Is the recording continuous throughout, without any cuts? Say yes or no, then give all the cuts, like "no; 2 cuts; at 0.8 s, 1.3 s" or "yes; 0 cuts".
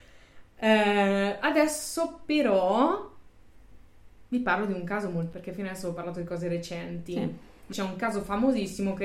no; 2 cuts; at 5.3 s, 7.7 s